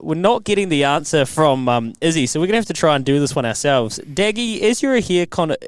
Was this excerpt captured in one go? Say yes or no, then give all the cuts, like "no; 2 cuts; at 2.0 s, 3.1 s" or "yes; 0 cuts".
yes; 0 cuts